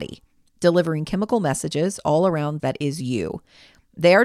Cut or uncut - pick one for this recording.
cut